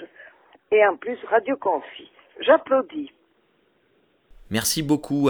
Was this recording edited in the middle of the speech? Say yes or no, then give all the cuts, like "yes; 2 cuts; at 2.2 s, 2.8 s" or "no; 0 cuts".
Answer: no; 0 cuts